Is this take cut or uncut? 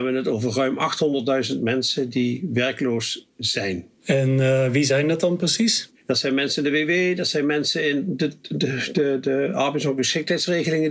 cut